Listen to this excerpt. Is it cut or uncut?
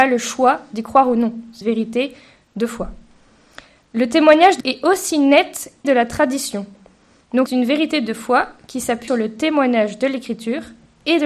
cut